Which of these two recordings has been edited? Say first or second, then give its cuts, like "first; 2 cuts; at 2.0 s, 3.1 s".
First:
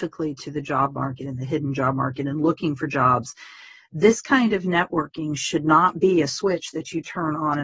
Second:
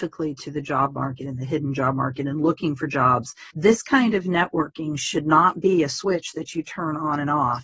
second; 1 cut; at 3.5 s